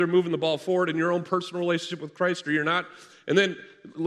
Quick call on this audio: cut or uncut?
uncut